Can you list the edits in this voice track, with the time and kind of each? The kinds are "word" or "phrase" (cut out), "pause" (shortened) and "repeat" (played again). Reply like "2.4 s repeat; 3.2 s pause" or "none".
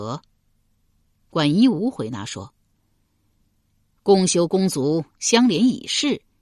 5.1 s phrase